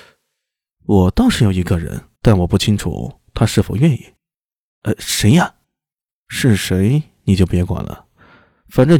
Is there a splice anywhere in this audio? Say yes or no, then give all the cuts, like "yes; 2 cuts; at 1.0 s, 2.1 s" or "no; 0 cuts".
yes; 3 cuts; at 2.2 s, 4.2 s, 5.6 s